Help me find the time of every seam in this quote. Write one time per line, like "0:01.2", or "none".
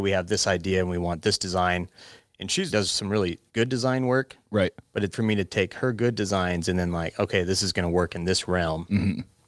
0:02.7
0:03.5
0:05.1